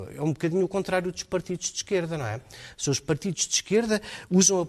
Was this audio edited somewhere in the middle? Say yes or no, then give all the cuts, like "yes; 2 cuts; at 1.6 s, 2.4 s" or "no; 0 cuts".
no; 0 cuts